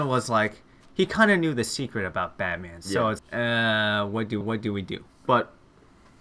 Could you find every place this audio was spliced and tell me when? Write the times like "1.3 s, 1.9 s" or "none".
3.2 s, 4.4 s